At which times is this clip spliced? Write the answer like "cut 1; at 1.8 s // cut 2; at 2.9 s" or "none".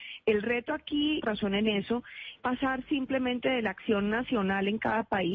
cut 1; at 1.2 s // cut 2; at 2.4 s